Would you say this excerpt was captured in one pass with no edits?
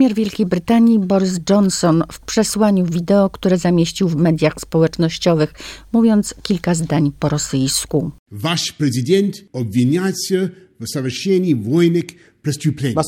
yes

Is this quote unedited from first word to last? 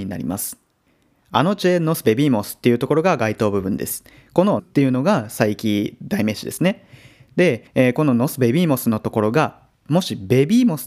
no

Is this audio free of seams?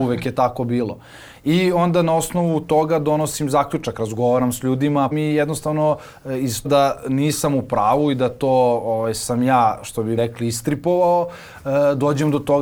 no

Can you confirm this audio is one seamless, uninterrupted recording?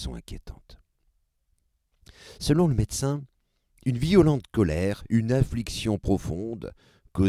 yes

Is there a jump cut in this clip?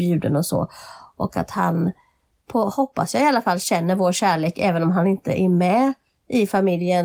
no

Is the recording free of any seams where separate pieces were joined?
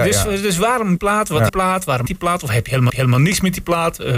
no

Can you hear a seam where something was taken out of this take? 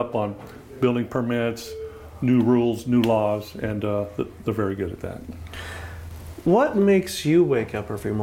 no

